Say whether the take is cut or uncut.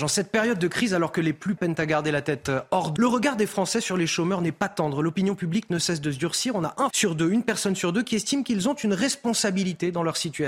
cut